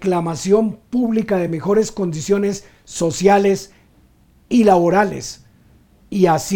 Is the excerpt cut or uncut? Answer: uncut